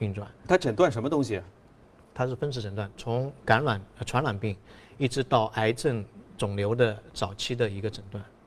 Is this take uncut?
yes; 0 cuts

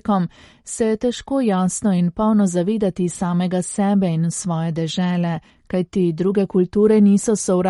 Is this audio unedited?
no; 1 cut; at 5.5 s

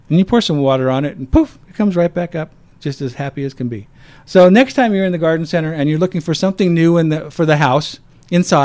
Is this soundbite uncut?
yes; 0 cuts

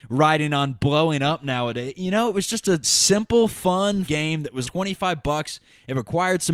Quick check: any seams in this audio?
yes; 3 cuts; at 2.8 s, 4.0 s, 4.6 s

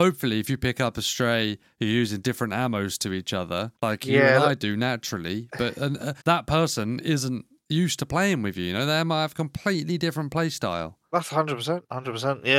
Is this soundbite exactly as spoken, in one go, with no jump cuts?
no; 2 cuts; at 3.7 s, 6.2 s

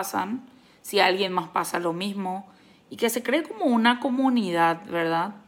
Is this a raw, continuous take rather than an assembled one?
yes; 0 cuts

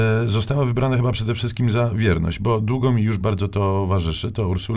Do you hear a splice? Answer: no; 0 cuts

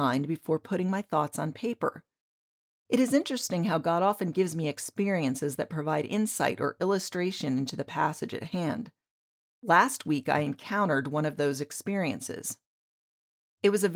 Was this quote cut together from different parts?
no; 0 cuts

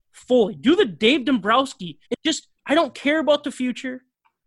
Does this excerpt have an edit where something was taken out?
yes; 2 cuts; at 2.1 s, 2.6 s

